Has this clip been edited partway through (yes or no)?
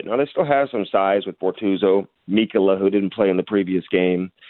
no